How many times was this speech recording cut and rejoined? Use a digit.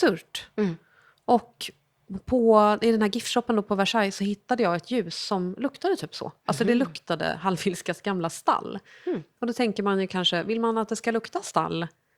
0